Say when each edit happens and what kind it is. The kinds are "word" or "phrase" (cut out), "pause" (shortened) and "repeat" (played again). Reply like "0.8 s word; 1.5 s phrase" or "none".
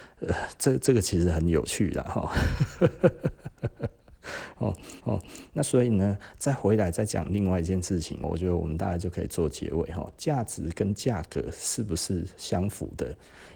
5.0 s repeat; 8.2 s word